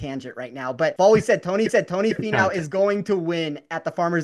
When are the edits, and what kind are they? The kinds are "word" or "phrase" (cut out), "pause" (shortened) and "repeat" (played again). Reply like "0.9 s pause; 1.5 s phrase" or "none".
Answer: 1.0 s word; 1.7 s repeat